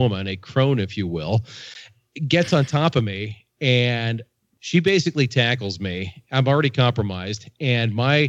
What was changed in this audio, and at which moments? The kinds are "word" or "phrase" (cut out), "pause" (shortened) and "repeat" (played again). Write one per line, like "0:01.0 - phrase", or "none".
none